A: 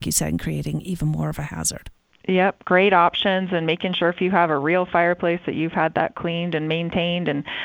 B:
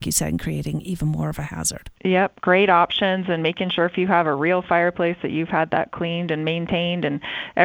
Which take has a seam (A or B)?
B